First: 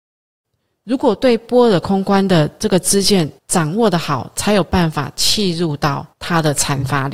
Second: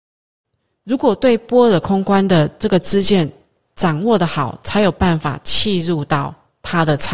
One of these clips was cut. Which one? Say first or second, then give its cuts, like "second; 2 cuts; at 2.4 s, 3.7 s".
first; 2 cuts; at 3.4 s, 6.1 s